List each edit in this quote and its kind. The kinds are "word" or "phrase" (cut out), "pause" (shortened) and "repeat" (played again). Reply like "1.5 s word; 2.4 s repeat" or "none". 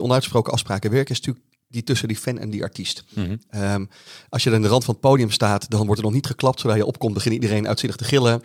none